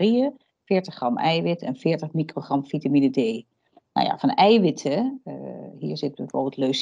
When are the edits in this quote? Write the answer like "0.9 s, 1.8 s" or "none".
none

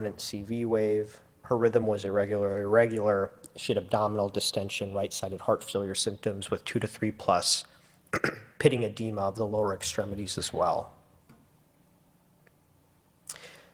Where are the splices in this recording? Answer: none

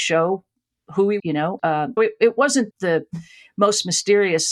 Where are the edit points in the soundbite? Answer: 1.2 s, 1.6 s, 2.0 s, 2.7 s

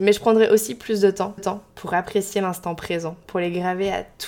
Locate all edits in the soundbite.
1.4 s

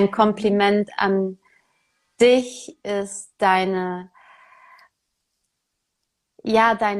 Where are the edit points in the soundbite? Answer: none

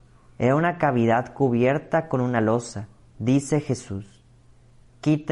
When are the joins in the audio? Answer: 3.0 s

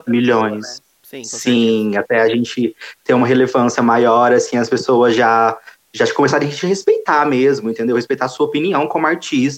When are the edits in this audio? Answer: 1.0 s

